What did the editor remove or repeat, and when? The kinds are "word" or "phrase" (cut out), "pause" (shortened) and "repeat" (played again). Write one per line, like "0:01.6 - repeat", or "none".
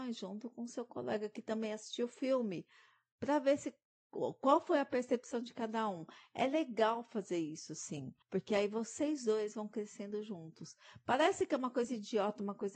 0:08.2 - pause